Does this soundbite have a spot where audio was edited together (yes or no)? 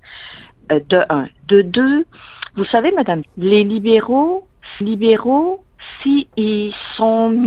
yes